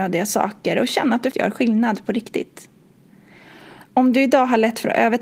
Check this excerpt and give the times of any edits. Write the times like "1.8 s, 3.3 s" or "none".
1.3 s